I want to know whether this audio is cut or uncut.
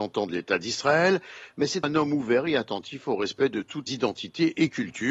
cut